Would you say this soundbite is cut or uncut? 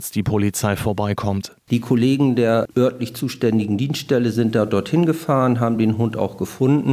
uncut